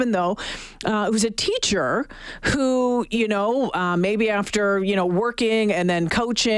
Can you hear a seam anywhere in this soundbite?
no; 0 cuts

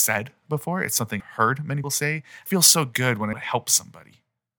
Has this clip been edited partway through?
yes; 4 cuts; at 1.2 s, 1.8 s, 2.5 s, 3.3 s

